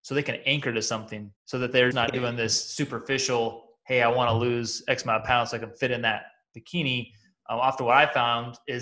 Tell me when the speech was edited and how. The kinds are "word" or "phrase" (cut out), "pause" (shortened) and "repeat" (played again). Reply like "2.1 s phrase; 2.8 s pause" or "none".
1.4 s pause; 1.9 s word